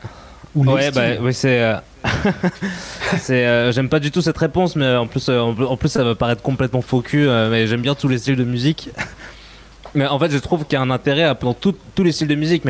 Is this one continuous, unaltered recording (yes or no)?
no